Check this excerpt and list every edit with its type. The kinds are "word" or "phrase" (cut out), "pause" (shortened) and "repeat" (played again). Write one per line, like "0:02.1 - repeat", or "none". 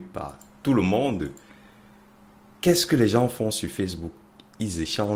none

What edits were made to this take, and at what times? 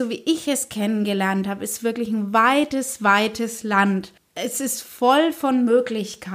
0:04.2 - pause

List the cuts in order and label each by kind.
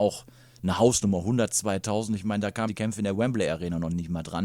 0:02.7 - word

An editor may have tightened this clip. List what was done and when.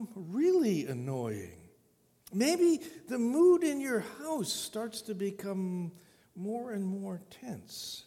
none

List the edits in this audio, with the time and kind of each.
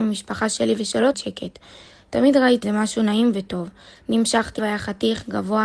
0:01.1 - word
0:02.6 - word
0:04.6 - word

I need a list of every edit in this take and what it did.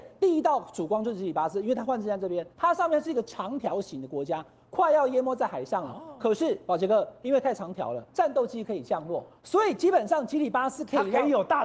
0:02.5 - pause
0:08.1 - pause
0:09.4 - pause

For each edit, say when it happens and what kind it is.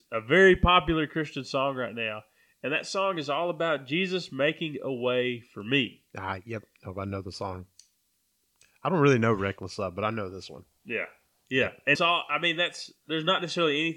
0:11.9 - word

